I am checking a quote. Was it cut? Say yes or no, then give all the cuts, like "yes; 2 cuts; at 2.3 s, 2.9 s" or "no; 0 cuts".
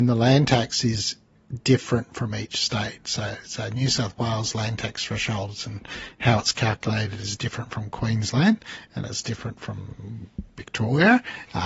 no; 0 cuts